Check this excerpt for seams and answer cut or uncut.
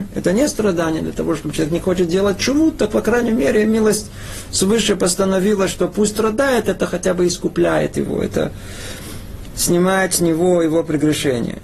uncut